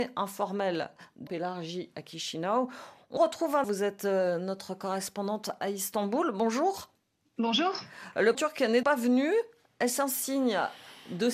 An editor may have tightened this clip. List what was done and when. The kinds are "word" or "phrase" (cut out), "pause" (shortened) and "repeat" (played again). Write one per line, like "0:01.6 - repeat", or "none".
0:01.3 - word
0:03.2 - word
0:03.6 - word
0:08.3 - word
0:08.8 - word